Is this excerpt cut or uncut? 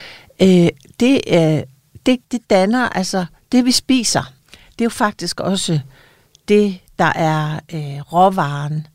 cut